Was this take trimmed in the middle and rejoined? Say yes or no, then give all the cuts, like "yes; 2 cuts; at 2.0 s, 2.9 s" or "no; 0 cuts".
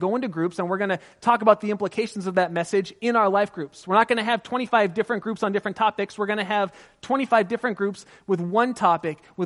no; 0 cuts